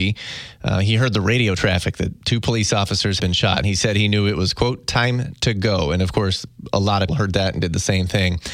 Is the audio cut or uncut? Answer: cut